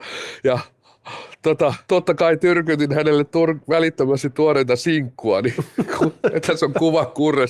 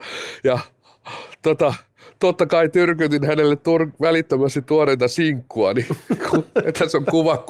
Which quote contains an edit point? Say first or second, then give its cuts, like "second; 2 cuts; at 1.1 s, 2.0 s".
first; 1 cut; at 1.8 s